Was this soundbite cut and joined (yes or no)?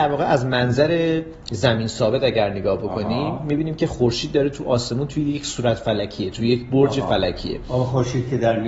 no